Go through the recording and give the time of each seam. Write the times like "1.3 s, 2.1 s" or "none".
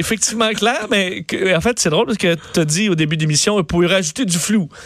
none